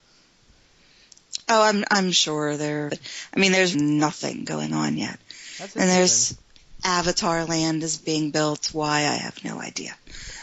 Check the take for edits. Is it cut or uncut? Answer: cut